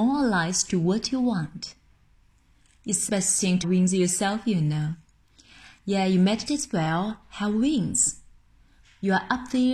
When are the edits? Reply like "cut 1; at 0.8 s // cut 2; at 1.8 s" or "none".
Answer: cut 1; at 3.1 s // cut 2; at 3.6 s // cut 3; at 6.5 s